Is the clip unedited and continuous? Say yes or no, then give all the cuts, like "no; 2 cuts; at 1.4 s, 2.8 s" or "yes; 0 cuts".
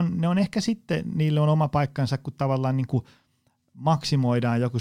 yes; 0 cuts